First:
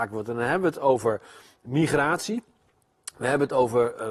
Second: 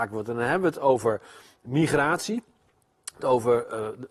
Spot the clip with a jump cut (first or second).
second